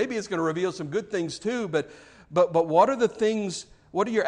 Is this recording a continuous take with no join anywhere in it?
yes; 0 cuts

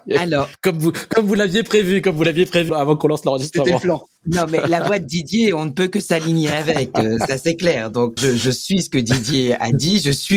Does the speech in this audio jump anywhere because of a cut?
yes; 2 cuts; at 2.7 s, 8.2 s

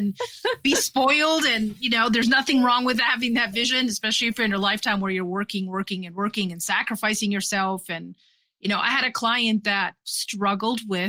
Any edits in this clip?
no; 0 cuts

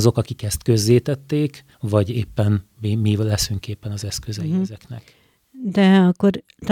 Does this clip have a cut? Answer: yes; 1 cut; at 1.7 s

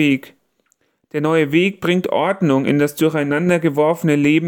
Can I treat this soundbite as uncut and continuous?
yes; 0 cuts

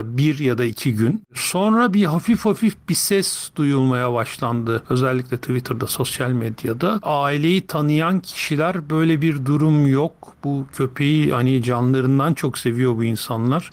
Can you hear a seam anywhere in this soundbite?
no; 0 cuts

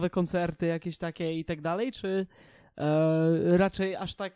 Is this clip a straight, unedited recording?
yes; 0 cuts

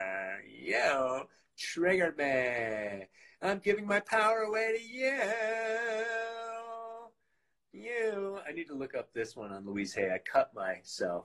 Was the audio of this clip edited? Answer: no; 0 cuts

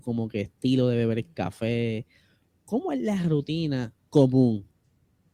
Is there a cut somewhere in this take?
no; 0 cuts

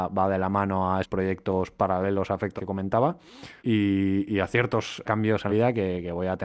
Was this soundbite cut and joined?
yes; 5 cuts; at 1.0 s, 2.6 s, 3.6 s, 5.0 s, 5.5 s

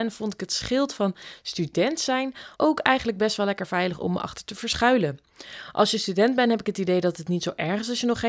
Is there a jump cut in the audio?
yes; 1 cut; at 2.5 s

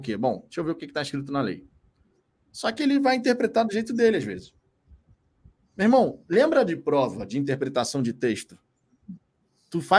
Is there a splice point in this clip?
no; 0 cuts

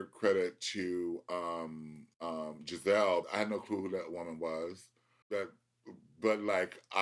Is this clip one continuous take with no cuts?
no; 3 cuts; at 2.1 s, 3.2 s, 5.2 s

